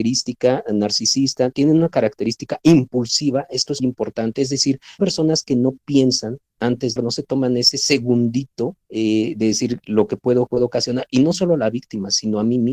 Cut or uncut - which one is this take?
cut